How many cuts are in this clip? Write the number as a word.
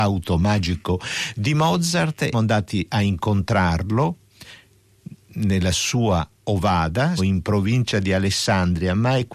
two